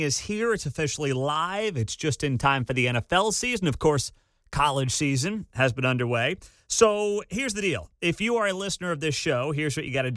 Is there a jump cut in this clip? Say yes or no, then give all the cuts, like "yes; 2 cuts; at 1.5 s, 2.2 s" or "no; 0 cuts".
no; 0 cuts